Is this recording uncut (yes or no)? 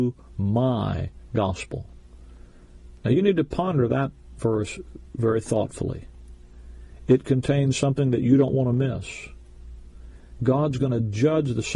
yes